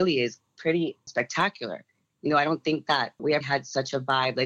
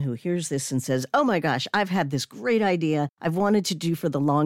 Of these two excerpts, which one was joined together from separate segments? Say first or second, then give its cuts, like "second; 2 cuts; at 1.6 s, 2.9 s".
first; 1 cut; at 3.4 s